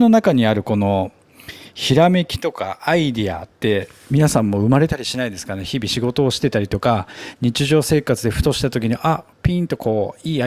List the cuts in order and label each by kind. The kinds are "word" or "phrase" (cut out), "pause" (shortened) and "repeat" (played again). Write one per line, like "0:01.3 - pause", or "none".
0:09.3 - pause